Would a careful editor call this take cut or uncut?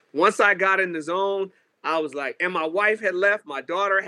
uncut